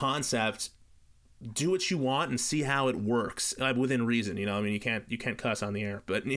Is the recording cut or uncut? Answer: uncut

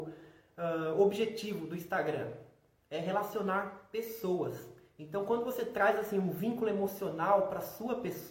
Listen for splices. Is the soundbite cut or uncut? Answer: uncut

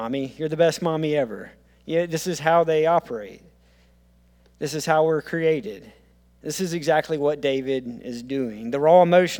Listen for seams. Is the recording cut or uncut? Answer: uncut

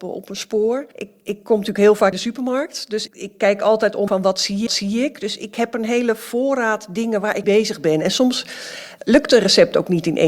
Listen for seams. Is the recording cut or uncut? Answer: cut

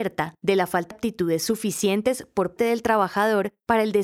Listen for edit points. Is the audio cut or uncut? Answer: cut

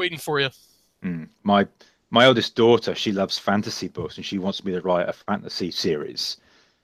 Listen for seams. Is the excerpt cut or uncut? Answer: uncut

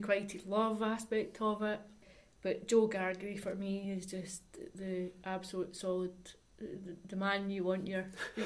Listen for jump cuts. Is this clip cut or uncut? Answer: uncut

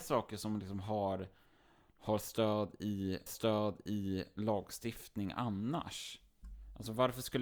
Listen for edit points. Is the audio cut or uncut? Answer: cut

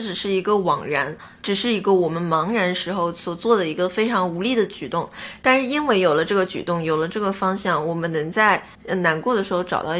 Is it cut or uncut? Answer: cut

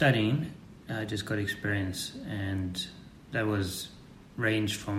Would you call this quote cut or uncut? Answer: uncut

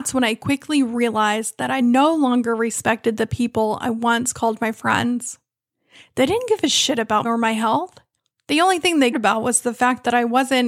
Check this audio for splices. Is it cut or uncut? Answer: cut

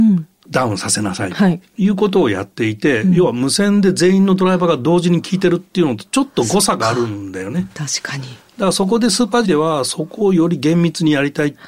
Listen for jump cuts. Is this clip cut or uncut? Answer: cut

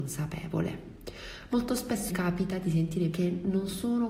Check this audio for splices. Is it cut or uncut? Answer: cut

